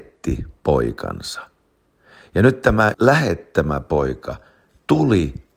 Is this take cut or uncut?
cut